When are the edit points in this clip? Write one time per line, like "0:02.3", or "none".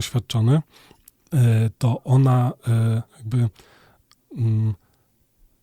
0:01.7
0:03.1